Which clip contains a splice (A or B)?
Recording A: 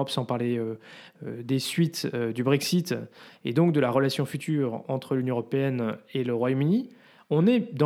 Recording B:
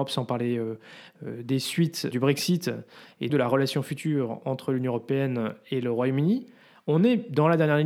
B